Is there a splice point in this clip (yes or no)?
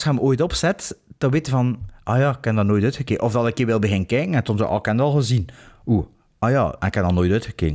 no